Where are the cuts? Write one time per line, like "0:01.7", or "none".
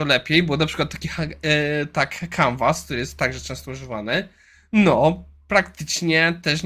none